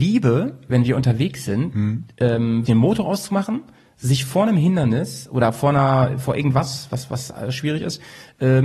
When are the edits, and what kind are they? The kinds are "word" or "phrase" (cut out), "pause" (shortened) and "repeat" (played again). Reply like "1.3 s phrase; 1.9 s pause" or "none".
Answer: 2.6 s word